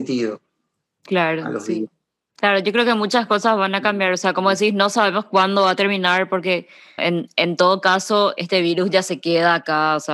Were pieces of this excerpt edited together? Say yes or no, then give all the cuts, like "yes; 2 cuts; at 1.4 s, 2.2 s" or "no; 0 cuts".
yes; 2 cuts; at 7.0 s, 8.4 s